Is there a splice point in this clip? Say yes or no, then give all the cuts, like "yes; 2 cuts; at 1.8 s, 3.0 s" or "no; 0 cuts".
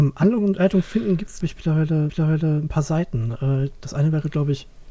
yes; 2 cuts; at 1.4 s, 2.1 s